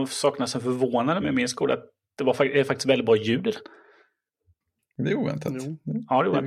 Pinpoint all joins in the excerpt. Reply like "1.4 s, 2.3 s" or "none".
1.2 s

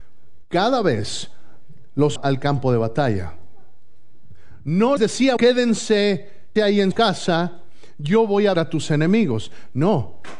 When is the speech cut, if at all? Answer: 2.2 s, 5.0 s, 5.4 s, 6.6 s, 6.9 s, 8.5 s

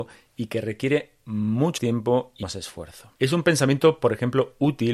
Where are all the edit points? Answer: 1.8 s, 2.4 s, 3.2 s

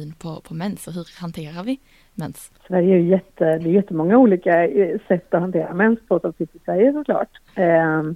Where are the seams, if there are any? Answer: 2.6 s

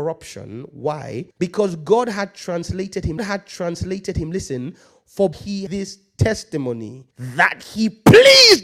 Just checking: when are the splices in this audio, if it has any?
1.3 s, 3.2 s, 5.3 s, 5.7 s, 7.1 s

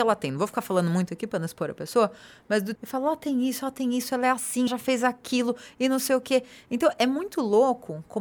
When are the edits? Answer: 2.7 s, 4.7 s

